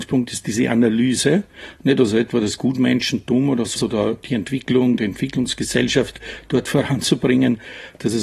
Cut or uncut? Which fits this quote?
cut